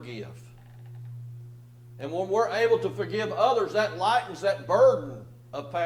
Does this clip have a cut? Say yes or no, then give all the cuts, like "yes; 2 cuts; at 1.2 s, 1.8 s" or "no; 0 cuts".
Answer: no; 0 cuts